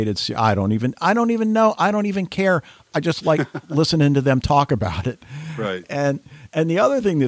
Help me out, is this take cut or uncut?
uncut